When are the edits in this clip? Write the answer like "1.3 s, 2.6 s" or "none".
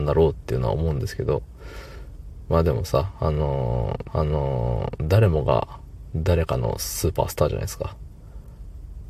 4.1 s